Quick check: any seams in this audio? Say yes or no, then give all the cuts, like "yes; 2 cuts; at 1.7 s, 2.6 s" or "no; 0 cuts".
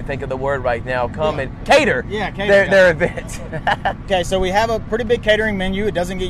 yes; 1 cut; at 4.0 s